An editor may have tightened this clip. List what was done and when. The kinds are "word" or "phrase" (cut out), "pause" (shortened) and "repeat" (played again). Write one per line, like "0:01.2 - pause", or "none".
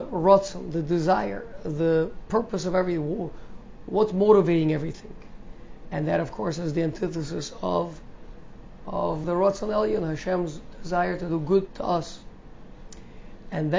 0:09.2 - word
0:11.7 - word